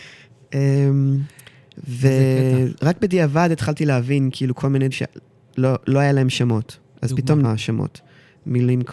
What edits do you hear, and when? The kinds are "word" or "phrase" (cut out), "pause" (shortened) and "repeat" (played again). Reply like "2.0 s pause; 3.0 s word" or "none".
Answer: 4.9 s word; 6.8 s pause; 7.4 s word

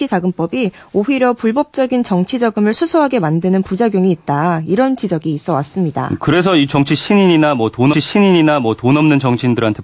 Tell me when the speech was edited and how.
7.9 s repeat

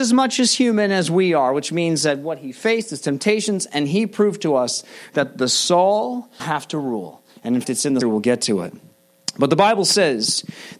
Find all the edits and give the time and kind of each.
6.4 s word; 7.6 s word; 8.0 s word

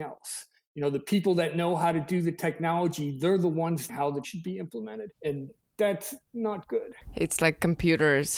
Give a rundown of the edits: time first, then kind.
3.9 s word; 4.2 s word; 5.1 s pause; 6.3 s pause

